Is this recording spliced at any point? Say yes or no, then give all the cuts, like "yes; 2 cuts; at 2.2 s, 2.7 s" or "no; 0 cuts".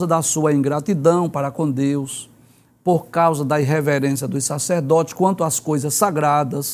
no; 0 cuts